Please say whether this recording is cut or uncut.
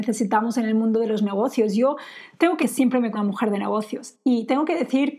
cut